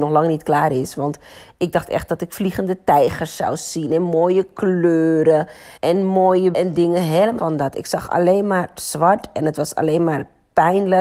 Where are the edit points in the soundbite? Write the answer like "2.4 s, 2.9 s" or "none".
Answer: 5.8 s, 6.5 s, 7.4 s